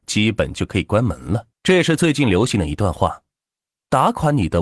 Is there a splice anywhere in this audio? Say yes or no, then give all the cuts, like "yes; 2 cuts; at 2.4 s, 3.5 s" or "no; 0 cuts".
yes; 1 cut; at 1.5 s